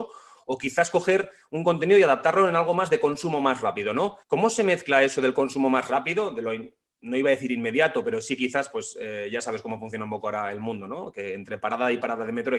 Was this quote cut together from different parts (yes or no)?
yes